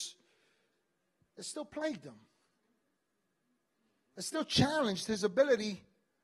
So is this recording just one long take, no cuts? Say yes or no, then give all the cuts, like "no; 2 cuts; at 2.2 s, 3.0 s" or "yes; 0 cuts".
yes; 0 cuts